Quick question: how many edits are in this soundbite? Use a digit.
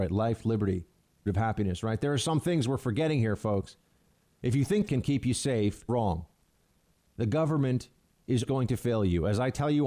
4